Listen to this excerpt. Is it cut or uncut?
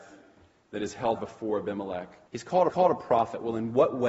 cut